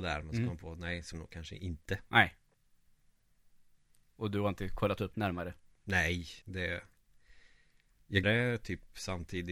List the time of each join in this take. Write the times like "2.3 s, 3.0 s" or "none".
1.1 s, 5.1 s, 6.4 s, 8.2 s